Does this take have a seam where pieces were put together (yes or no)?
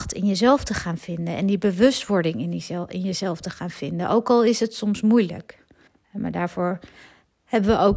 yes